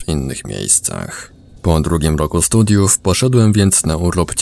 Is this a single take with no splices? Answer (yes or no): yes